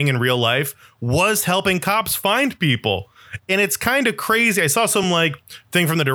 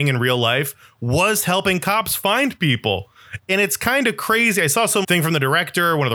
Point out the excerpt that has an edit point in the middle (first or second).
second